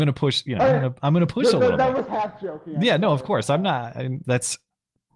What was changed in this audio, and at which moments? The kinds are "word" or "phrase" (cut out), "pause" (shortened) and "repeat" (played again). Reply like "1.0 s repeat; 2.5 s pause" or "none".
4.2 s word